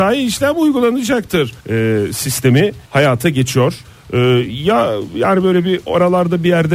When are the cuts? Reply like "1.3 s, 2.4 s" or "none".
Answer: 1.6 s, 2.9 s, 3.8 s